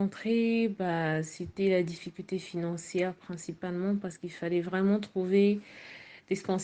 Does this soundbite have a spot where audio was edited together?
no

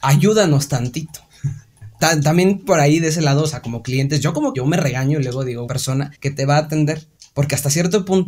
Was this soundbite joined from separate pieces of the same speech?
yes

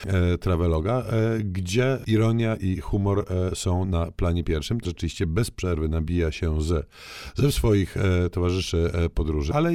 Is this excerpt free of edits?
no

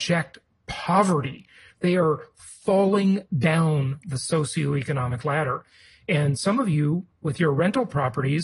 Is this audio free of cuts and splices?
yes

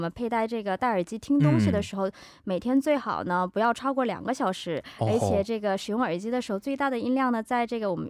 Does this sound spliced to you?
no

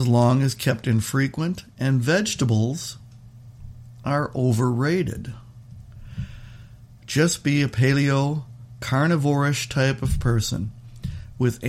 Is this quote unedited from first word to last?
yes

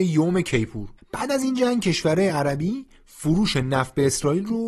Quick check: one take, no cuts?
yes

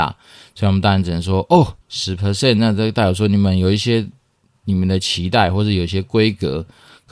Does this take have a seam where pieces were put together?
yes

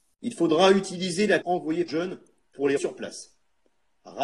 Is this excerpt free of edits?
no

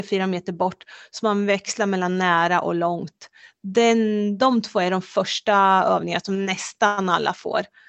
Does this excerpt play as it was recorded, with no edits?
yes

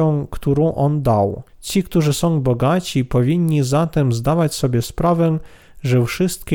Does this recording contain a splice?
yes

